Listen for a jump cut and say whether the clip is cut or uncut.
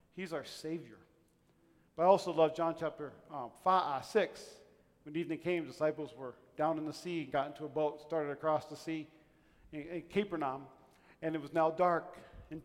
uncut